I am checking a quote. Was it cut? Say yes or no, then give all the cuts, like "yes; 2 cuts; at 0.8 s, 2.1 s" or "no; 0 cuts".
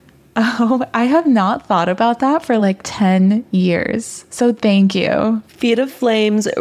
no; 0 cuts